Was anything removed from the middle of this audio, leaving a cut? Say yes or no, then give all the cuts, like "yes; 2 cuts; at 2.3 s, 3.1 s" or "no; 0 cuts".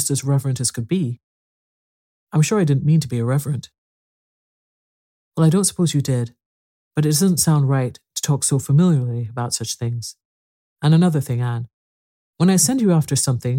no; 0 cuts